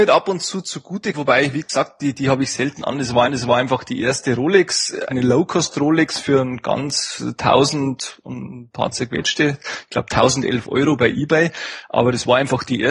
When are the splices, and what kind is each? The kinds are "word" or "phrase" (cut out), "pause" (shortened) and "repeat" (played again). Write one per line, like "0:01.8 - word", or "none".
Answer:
0:01.1 - word
0:03.2 - repeat
0:05.1 - word